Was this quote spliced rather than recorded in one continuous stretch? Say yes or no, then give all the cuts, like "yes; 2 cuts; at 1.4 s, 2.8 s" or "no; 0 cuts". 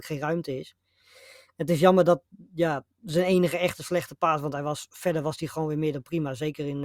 no; 0 cuts